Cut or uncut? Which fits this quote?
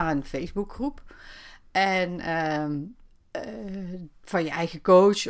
uncut